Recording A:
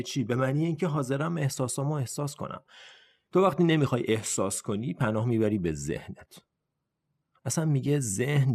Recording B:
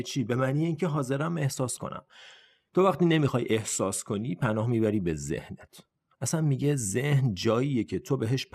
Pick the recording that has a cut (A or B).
B